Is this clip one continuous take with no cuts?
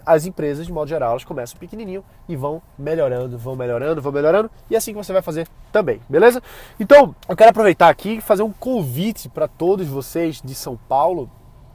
no; 1 cut; at 7.2 s

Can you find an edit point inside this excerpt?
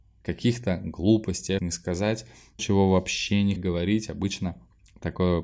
yes; 3 cuts; at 1.6 s, 2.6 s, 3.6 s

